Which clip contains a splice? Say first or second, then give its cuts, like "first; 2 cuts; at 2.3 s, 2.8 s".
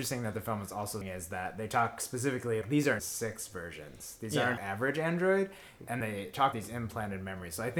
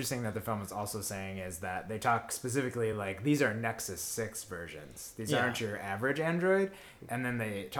first; 6 cuts; at 1.0 s, 2.6 s, 3.0 s, 4.6 s, 6.0 s, 6.5 s